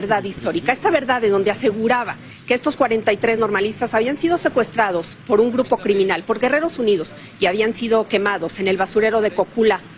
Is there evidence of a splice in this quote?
no; 0 cuts

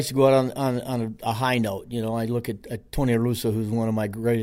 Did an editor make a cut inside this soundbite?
yes; 1 cut; at 2.9 s

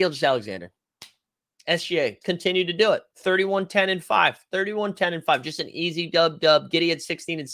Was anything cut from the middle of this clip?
yes; 1 cut; at 2.2 s

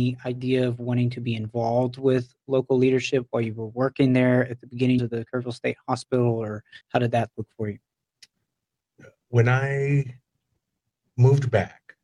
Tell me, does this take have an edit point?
yes; 2 cuts; at 5.0 s, 6.8 s

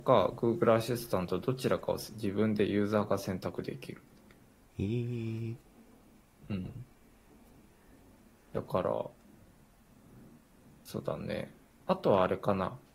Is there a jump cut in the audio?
no; 0 cuts

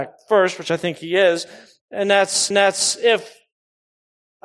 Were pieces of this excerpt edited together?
yes; 1 cut; at 2.5 s

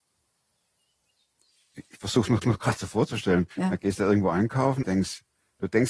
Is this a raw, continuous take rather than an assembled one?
no; 3 cuts; at 2.4 s, 3.5 s, 4.8 s

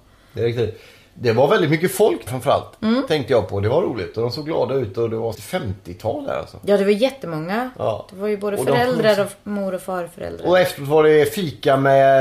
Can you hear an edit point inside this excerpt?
yes; 2 cuts; at 2.3 s, 5.3 s

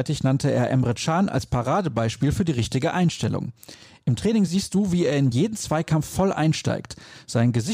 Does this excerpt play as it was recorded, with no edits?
yes; 0 cuts

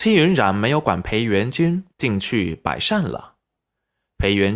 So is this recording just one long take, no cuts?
no; 1 cut; at 1.9 s

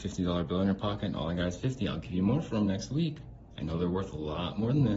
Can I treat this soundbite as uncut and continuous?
yes; 0 cuts

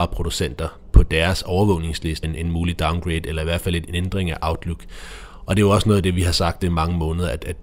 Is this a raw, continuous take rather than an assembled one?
no; 3 cuts; at 2.2 s, 3.9 s, 6.6 s

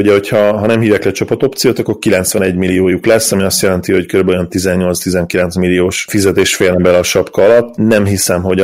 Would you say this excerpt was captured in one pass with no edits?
yes; 0 cuts

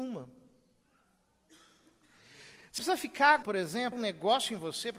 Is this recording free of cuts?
no; 3 cuts; at 2.8 s, 3.4 s, 3.9 s

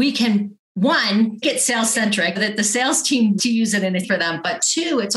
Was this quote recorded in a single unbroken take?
no; 4 cuts; at 1.4 s, 2.4 s, 3.4 s, 4.0 s

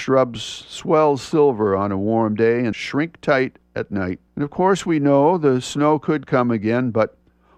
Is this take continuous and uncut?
no; 3 cuts; at 2.7 s, 3.7 s, 4.3 s

